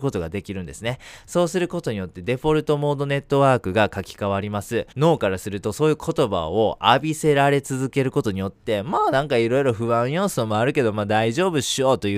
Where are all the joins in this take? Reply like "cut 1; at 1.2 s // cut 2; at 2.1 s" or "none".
cut 1; at 4.9 s